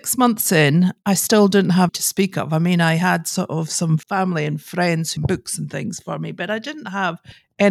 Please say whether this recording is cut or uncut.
cut